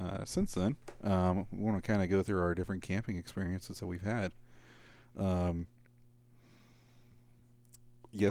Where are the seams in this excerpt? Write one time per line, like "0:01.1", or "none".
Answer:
none